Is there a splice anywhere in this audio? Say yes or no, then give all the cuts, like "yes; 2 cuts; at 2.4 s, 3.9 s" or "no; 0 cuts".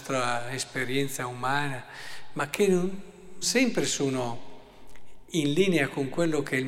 yes; 1 cut; at 3.4 s